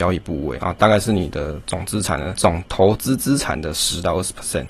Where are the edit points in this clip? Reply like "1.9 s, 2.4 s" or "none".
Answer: 2.4 s